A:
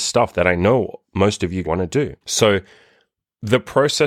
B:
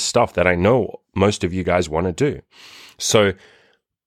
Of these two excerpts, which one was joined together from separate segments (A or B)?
A